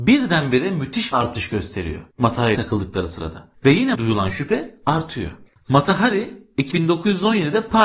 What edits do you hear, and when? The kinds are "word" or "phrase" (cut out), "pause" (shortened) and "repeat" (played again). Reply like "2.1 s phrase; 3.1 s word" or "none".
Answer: 1.1 s word; 2.5 s word; 3.9 s word; 6.7 s word